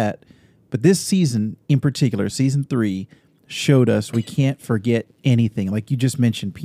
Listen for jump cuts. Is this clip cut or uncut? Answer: uncut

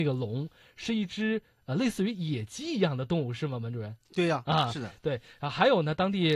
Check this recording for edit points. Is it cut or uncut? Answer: uncut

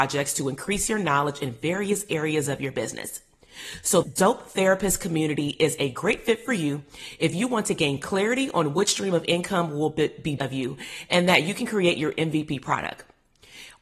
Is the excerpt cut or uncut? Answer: cut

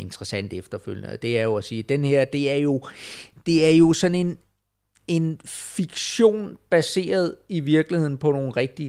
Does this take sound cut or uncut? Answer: uncut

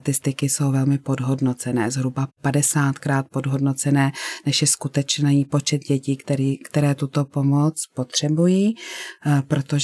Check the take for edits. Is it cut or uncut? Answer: uncut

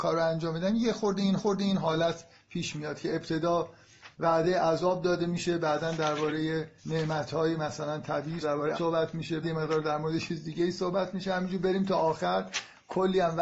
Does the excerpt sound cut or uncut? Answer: cut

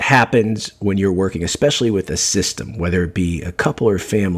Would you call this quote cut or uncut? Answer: uncut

